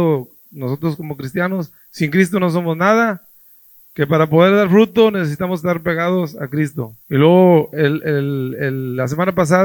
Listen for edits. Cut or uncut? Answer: cut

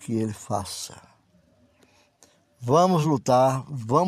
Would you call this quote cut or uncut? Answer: uncut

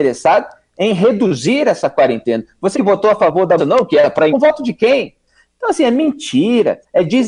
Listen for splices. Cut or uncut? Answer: cut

